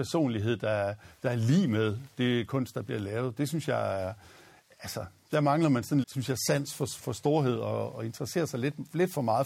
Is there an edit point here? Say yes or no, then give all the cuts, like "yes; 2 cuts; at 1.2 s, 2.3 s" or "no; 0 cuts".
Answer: yes; 2 cuts; at 6.0 s, 7.0 s